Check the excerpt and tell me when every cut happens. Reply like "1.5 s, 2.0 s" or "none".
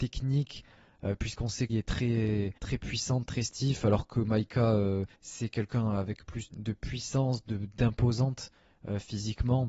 1.7 s, 2.6 s, 5.1 s, 6.5 s